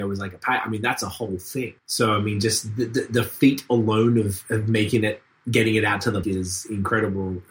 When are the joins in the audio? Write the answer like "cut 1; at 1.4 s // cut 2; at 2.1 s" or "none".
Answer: cut 1; at 1.8 s // cut 2; at 6.2 s